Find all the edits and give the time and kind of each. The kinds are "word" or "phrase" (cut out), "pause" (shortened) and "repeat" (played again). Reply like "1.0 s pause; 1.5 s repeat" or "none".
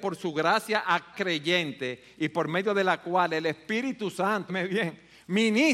1.1 s word; 4.5 s word